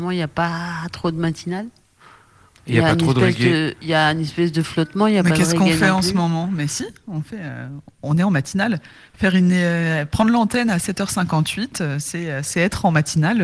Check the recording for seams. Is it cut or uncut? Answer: uncut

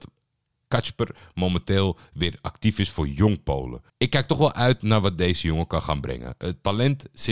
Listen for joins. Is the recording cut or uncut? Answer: cut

